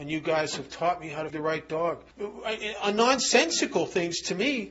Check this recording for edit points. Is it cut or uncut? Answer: cut